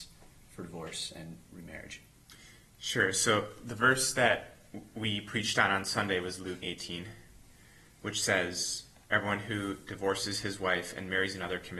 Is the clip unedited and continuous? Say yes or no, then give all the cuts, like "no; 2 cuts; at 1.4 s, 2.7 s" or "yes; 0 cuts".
no; 1 cut; at 6.6 s